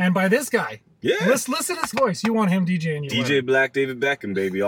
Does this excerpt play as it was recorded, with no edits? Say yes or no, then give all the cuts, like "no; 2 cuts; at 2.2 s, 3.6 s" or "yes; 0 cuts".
no; 1 cut; at 1.9 s